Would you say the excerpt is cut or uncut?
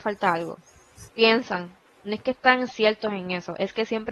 cut